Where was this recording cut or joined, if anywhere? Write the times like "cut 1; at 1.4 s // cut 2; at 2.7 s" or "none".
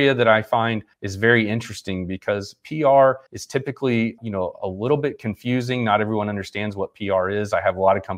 cut 1; at 0.9 s // cut 2; at 3.3 s // cut 3; at 4.2 s

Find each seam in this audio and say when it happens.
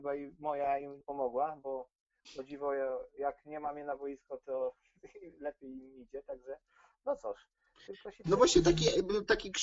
cut 1; at 1.0 s

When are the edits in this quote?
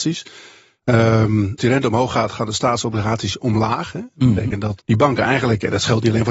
cut 1; at 1.6 s // cut 2; at 4.8 s

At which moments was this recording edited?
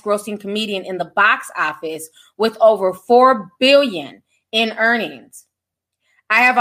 none

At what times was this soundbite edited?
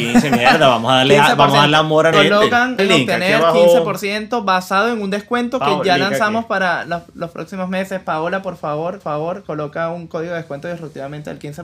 cut 1; at 2.1 s // cut 2; at 2.8 s // cut 3; at 9.0 s

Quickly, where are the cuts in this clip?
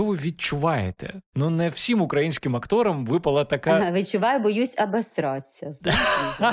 cut 1; at 1.3 s

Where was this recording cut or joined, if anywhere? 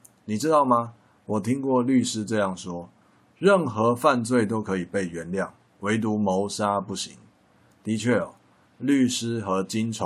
none

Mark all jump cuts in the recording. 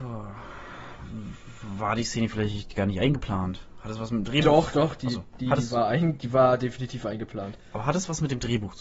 none

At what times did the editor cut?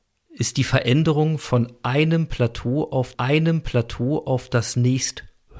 cut 1; at 3.1 s

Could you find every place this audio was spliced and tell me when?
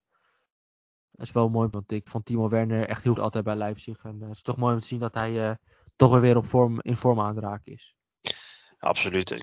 cut 1; at 1.7 s // cut 2; at 2.1 s // cut 3; at 3.2 s

